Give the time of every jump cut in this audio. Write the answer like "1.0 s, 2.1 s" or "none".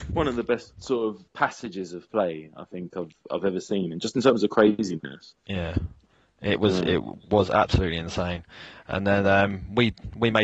1.3 s, 5.4 s